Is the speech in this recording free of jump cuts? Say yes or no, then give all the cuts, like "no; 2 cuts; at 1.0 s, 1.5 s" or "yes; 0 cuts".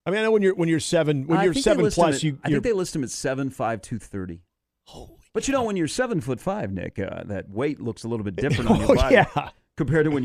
no; 1 cut; at 4.5 s